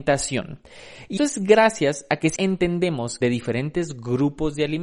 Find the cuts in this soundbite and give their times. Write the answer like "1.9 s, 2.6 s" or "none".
1.2 s, 2.4 s, 3.2 s